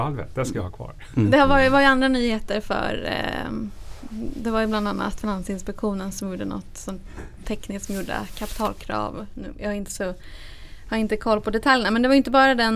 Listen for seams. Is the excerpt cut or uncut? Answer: uncut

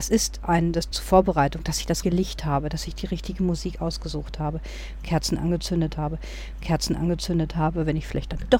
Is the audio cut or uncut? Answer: cut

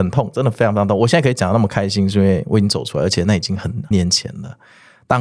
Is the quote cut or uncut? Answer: cut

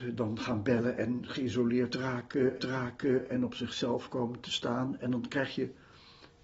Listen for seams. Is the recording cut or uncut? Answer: cut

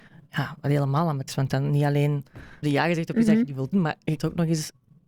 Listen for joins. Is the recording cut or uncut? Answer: cut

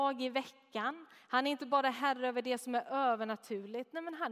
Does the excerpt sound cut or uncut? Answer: uncut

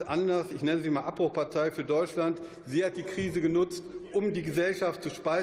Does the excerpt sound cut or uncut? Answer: uncut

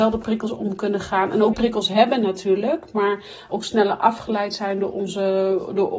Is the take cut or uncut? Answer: cut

